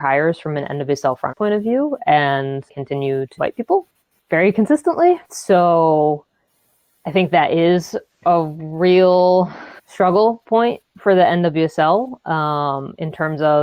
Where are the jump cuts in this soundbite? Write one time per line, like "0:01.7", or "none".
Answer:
0:01.3
0:02.7
0:03.4
0:04.2
0:05.2
0:09.8